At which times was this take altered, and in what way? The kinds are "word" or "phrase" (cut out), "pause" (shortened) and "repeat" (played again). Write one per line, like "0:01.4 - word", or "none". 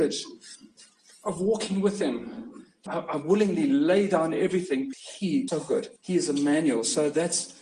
0:02.9 - word
0:04.9 - word
0:05.5 - word
0:06.0 - pause